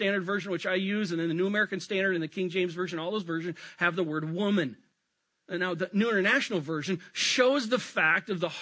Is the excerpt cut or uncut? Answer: uncut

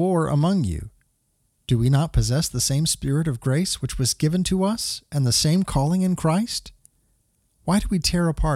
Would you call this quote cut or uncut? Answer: uncut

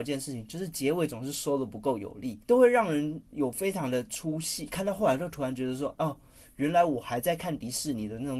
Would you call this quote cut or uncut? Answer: cut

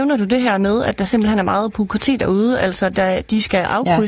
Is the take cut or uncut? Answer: uncut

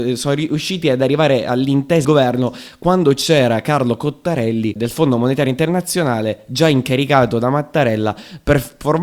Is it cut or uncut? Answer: cut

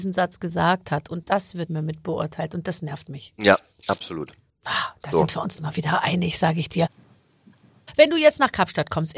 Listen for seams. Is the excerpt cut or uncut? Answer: cut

